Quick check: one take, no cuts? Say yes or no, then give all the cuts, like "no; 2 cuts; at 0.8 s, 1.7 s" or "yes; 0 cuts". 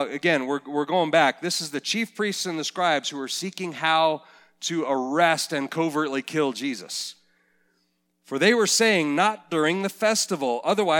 yes; 0 cuts